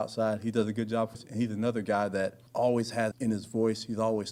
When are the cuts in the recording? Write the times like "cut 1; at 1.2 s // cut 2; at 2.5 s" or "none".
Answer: cut 1; at 1.1 s // cut 2; at 2.5 s // cut 3; at 3.1 s